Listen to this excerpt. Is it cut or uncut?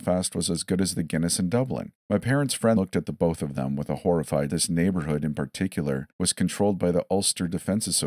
cut